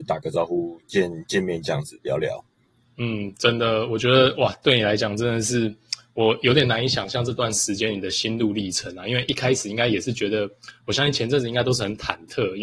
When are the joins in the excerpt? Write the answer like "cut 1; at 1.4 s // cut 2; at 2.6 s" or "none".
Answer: cut 1; at 2.8 s